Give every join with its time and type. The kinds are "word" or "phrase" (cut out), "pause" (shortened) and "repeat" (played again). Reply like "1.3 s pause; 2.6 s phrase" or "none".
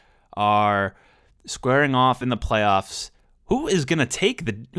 none